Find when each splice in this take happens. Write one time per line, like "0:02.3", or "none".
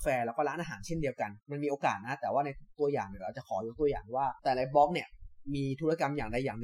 0:01.4
0:04.4